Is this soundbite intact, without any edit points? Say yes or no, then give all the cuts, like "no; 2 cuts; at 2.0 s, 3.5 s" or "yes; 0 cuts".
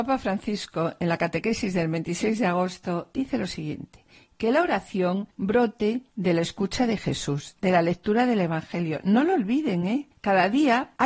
no; 1 cut; at 5.3 s